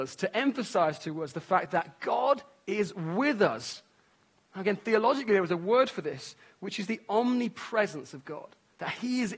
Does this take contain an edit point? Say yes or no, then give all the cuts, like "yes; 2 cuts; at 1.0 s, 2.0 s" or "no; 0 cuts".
no; 0 cuts